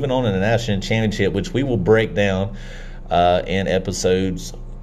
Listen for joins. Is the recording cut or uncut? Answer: uncut